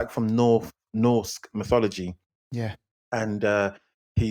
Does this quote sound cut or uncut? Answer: uncut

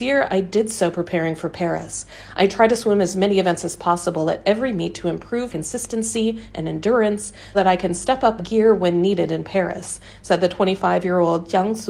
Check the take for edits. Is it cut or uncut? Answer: cut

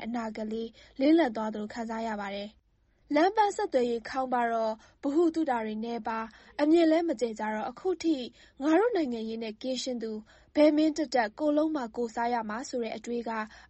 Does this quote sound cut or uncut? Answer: uncut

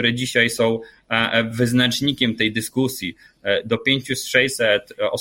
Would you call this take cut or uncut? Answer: uncut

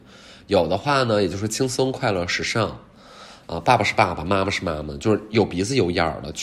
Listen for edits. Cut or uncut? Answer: uncut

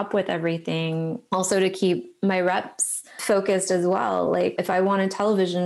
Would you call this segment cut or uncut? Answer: uncut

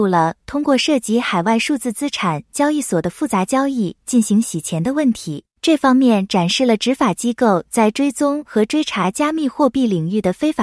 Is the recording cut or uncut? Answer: cut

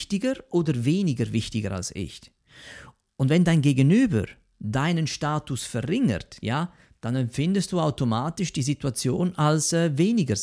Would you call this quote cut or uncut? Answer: uncut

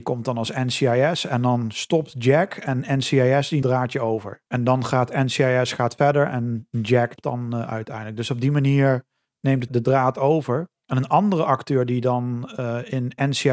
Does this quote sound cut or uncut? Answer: cut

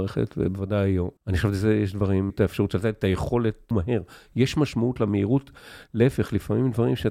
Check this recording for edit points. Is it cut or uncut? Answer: cut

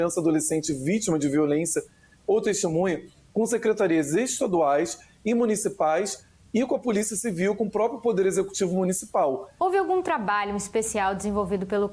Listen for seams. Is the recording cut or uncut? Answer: uncut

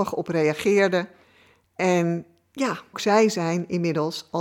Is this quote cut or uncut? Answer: cut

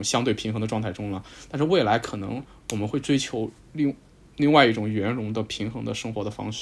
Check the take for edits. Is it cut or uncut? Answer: cut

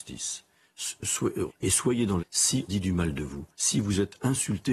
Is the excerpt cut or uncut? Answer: cut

